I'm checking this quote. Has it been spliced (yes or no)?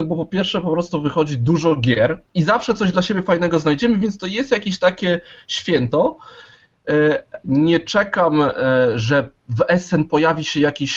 yes